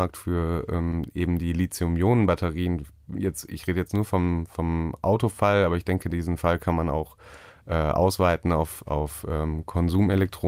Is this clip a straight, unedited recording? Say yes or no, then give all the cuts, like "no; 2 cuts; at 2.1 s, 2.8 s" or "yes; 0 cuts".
yes; 0 cuts